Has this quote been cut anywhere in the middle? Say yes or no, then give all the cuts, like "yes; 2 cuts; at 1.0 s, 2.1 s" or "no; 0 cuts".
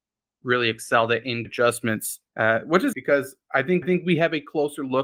yes; 4 cuts; at 1.4 s, 2.3 s, 2.9 s, 3.8 s